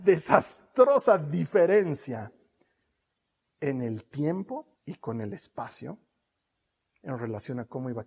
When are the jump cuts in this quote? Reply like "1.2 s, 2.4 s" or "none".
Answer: 4.8 s